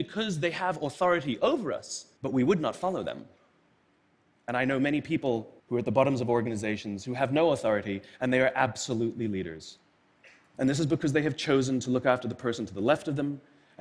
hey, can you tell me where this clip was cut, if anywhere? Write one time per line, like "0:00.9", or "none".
0:02.2
0:05.6